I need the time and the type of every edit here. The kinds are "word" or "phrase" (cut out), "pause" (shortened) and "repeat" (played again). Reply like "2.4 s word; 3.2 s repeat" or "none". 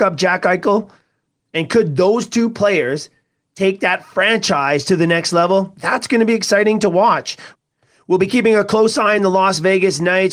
none